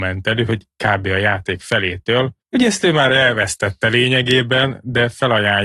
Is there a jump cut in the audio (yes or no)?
yes